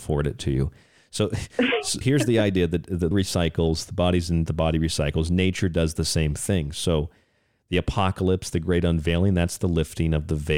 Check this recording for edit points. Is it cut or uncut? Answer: cut